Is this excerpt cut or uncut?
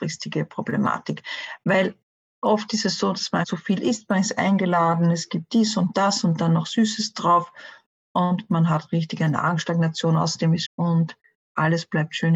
cut